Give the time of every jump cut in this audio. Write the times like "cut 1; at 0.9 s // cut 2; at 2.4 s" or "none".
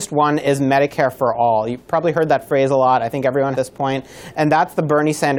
cut 1; at 3.5 s